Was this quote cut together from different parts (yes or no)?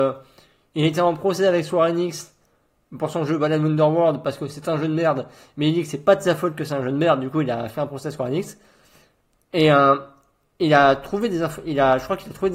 no